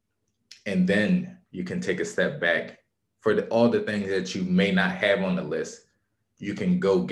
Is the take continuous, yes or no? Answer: yes